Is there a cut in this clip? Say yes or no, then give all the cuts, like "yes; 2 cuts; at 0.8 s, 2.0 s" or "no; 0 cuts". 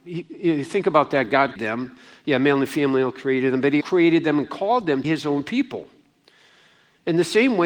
yes; 3 cuts; at 1.6 s, 3.8 s, 5.0 s